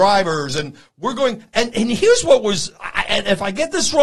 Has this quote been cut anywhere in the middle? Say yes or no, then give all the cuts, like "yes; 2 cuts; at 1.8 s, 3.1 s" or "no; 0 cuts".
no; 0 cuts